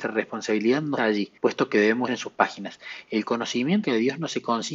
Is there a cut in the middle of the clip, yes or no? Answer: yes